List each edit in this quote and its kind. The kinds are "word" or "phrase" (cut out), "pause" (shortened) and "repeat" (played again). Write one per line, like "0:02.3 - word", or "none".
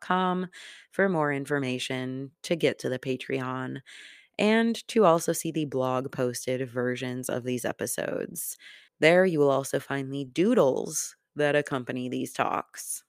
0:08.9 - pause